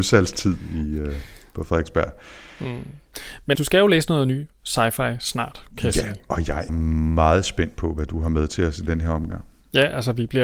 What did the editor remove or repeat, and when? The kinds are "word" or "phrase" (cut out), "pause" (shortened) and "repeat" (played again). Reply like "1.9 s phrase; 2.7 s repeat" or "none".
3.6 s word; 6.7 s word